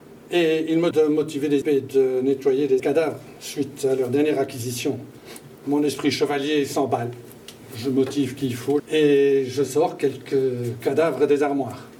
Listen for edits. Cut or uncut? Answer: cut